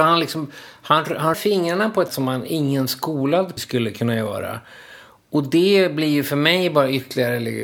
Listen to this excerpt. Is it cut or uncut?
cut